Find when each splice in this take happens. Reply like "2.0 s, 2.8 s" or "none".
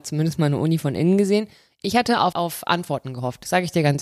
2.3 s